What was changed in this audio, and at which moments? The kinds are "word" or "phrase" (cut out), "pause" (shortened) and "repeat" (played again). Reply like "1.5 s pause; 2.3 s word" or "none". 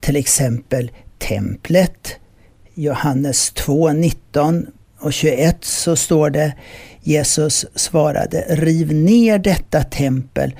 none